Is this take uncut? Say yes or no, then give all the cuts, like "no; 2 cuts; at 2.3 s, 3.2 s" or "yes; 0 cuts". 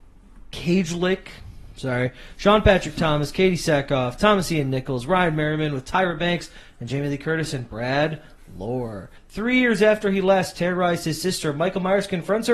no; 1 cut; at 9.2 s